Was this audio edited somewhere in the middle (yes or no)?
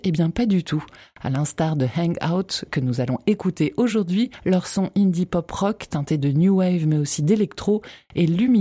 no